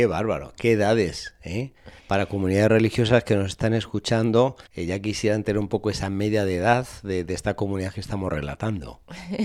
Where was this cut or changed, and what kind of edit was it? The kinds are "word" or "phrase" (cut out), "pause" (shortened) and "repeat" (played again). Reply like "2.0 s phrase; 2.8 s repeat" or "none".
2.0 s pause; 4.7 s pause